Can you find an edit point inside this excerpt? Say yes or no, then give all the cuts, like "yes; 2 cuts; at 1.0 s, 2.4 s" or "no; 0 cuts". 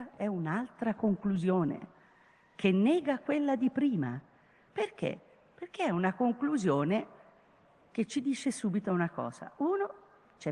no; 0 cuts